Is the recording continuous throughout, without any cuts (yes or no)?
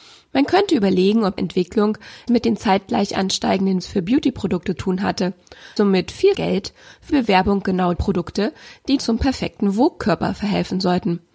no